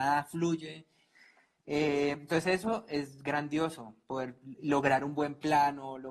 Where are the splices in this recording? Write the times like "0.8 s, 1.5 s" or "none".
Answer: none